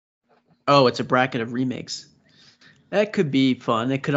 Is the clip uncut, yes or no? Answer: yes